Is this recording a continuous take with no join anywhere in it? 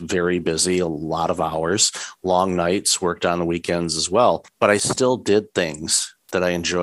yes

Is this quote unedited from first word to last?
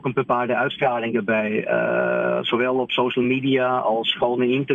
yes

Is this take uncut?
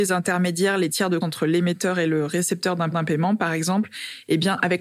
no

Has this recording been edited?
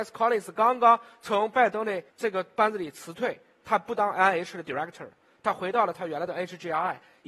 no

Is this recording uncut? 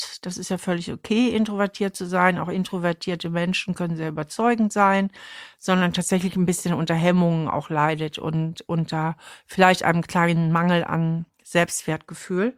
yes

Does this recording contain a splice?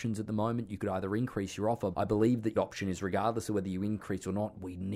yes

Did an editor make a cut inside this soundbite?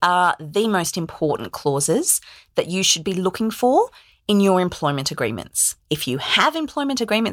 no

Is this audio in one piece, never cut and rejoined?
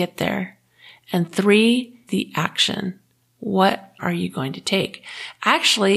no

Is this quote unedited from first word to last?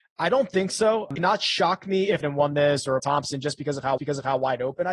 no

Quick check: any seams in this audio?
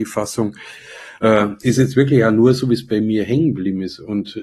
no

